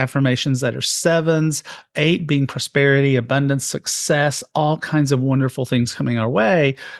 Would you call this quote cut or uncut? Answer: uncut